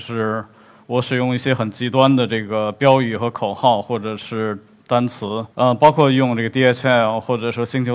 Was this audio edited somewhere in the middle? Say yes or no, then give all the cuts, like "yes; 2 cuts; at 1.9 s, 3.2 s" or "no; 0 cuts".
yes; 1 cut; at 5.5 s